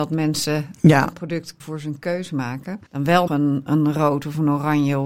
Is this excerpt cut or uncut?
cut